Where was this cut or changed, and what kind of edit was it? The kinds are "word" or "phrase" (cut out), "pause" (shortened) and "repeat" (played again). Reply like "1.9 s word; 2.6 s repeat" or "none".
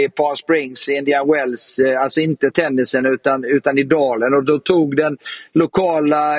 none